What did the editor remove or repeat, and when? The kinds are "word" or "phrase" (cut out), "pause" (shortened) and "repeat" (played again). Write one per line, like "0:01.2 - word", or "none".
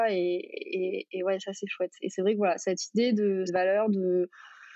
0:03.5 - word